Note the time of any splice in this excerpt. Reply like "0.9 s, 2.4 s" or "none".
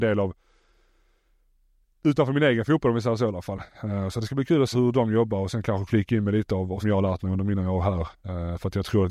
4.7 s, 5.9 s, 6.8 s